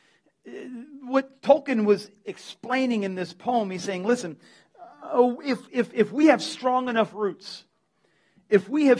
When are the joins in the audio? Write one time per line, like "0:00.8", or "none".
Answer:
0:01.4